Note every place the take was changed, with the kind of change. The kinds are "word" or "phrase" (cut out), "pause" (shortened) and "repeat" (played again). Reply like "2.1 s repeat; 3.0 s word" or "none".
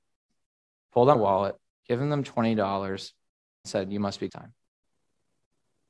1.1 s word; 1.7 s pause; 3.6 s word; 4.3 s phrase